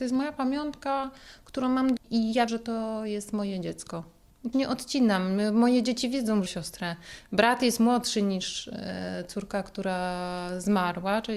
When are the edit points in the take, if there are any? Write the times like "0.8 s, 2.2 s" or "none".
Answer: 2.0 s, 2.5 s, 4.5 s, 6.5 s